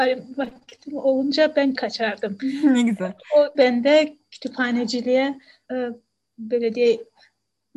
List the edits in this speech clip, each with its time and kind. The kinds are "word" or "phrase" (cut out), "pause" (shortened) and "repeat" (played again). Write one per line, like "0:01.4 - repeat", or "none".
0:01.7 - word
0:03.5 - word
0:05.7 - word